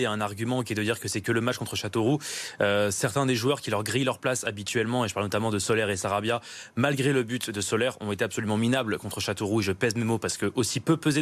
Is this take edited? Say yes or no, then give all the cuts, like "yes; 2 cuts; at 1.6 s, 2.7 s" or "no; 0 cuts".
no; 0 cuts